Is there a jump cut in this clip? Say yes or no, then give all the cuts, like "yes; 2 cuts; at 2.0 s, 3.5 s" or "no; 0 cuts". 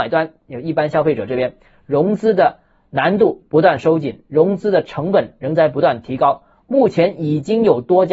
no; 0 cuts